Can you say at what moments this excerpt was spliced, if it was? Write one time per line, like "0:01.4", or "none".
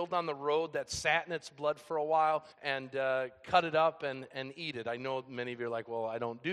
0:02.5